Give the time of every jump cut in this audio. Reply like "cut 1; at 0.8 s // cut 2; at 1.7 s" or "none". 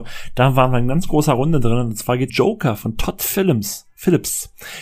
cut 1; at 2.3 s